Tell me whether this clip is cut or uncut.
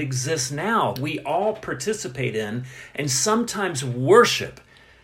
cut